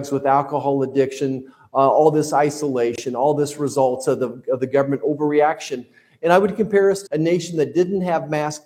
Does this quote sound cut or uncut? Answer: cut